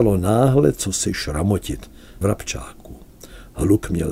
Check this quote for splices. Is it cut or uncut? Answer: cut